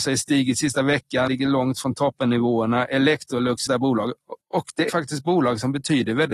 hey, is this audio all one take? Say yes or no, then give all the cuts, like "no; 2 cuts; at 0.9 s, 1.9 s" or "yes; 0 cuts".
no; 4 cuts; at 1.3 s, 3.7 s, 4.4 s, 4.9 s